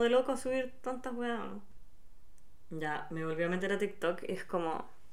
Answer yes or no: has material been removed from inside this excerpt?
no